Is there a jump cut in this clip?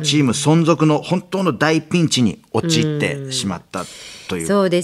no; 0 cuts

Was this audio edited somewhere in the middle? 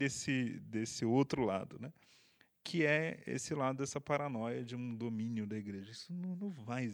no; 0 cuts

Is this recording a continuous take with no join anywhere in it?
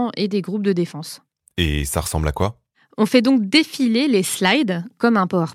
yes; 0 cuts

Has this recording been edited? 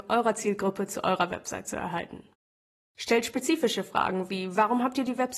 no; 0 cuts

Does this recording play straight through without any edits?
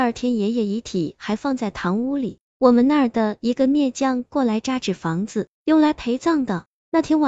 no; 1 cut; at 5.5 s

